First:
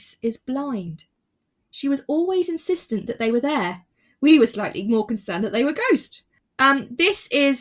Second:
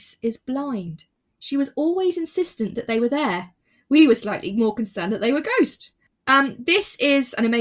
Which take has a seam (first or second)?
second